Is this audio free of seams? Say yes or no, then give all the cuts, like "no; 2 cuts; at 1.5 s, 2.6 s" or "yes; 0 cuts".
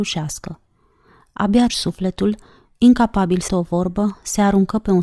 no; 2 cuts; at 1.7 s, 3.5 s